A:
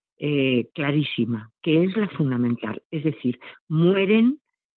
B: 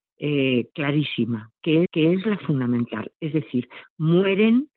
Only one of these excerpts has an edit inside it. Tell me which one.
B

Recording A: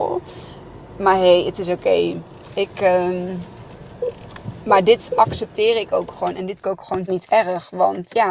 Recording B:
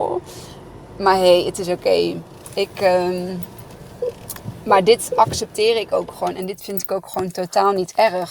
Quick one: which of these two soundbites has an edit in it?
A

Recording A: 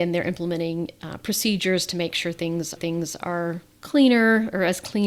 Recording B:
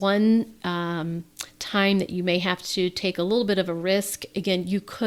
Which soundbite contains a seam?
A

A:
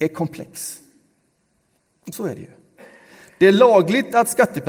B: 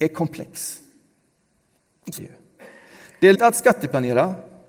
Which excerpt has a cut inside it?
B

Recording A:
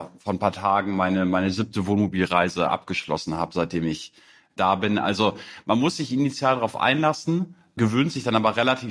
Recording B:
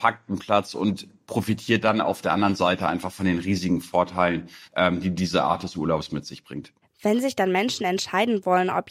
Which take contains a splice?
B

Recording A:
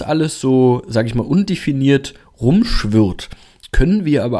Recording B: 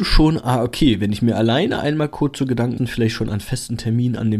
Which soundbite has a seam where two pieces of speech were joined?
B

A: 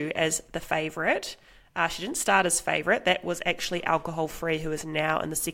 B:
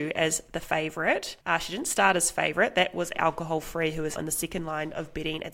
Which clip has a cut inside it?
B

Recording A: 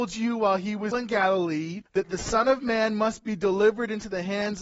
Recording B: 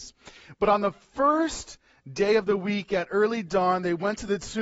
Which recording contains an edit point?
A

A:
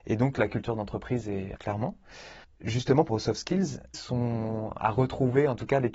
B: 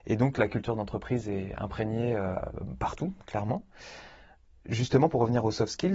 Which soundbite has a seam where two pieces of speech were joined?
A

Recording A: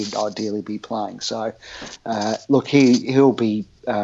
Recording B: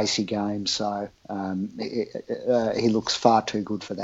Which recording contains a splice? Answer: B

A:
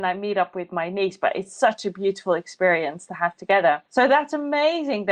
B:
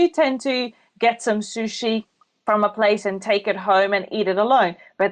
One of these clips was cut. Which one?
A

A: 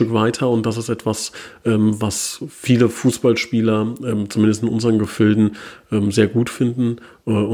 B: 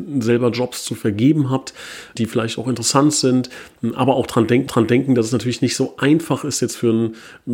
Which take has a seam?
B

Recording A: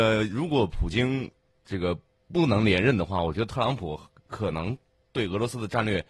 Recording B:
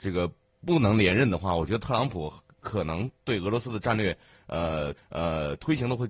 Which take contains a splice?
B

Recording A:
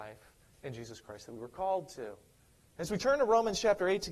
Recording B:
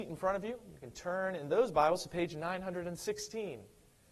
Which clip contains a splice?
A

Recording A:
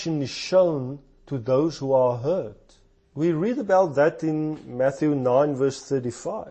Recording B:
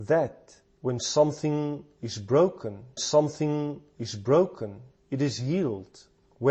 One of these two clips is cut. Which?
B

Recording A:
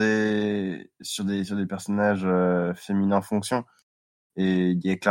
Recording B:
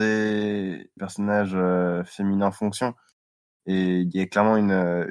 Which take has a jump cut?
B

